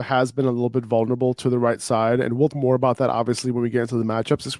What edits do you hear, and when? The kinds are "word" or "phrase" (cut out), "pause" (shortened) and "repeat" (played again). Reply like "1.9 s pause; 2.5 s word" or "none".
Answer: 2.5 s word